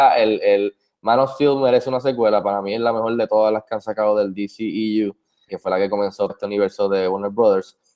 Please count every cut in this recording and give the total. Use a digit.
2